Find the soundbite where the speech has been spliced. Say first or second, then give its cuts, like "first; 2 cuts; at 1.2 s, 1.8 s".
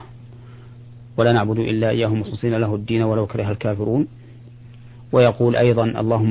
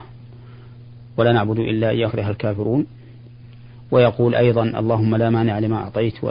second; 1 cut; at 2.1 s